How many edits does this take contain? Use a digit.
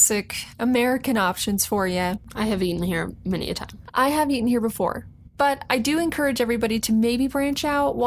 0